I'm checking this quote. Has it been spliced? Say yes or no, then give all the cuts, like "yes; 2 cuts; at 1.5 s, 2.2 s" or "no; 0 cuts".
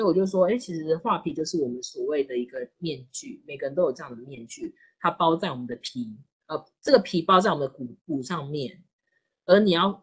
yes; 1 cut; at 8.0 s